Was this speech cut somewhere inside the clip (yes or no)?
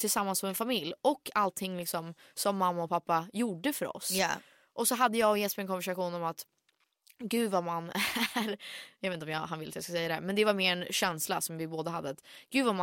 no